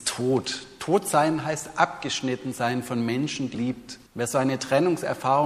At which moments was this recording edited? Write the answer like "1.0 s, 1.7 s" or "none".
3.5 s, 4.1 s